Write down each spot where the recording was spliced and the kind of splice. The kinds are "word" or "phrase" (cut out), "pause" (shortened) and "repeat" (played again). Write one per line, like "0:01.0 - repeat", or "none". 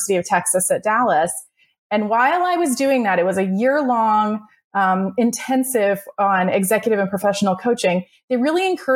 none